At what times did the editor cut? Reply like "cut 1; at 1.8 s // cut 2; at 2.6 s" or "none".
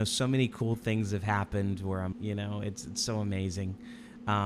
cut 1; at 2.1 s